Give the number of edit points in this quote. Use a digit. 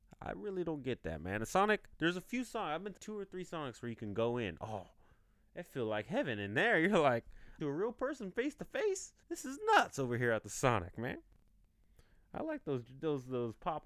3